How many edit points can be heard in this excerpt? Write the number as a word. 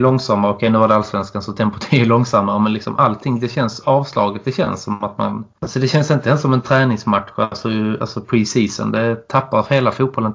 zero